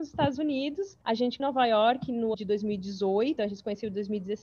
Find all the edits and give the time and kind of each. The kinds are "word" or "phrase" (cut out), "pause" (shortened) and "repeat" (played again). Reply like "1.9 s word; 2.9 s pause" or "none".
1.0 s pause; 1.4 s phrase; 2.3 s word; 3.4 s word